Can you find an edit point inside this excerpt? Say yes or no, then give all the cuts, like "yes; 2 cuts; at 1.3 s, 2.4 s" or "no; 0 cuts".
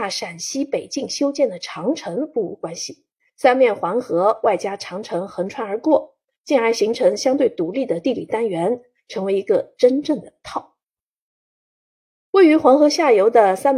yes; 1 cut; at 3.2 s